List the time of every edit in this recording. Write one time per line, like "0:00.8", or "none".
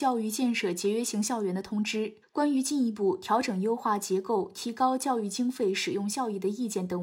0:02.2